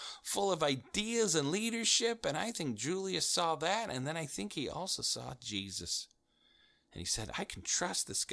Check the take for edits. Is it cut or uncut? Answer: uncut